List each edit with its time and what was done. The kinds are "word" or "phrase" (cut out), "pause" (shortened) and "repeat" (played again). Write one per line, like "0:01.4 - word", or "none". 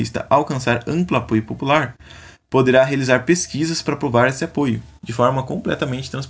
none